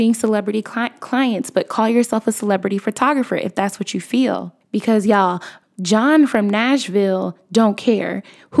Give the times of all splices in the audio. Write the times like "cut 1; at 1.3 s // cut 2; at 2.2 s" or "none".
none